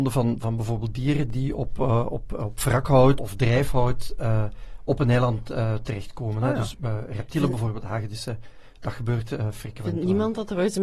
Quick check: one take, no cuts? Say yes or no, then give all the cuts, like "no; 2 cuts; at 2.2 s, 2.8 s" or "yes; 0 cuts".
no; 1 cut; at 3.2 s